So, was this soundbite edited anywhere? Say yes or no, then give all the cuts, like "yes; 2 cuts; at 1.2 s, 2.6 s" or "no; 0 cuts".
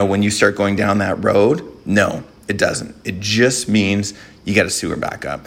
no; 0 cuts